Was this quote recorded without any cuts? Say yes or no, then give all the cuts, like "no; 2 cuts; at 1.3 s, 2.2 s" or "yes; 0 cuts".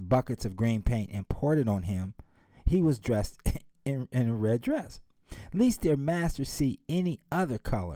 yes; 0 cuts